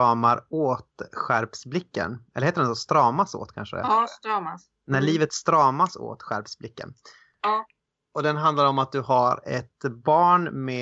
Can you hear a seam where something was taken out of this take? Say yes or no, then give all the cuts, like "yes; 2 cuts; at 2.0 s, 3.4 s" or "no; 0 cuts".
no; 0 cuts